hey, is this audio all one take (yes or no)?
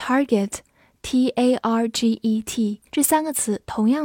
no